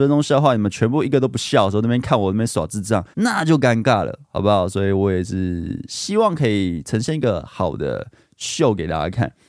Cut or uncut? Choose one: cut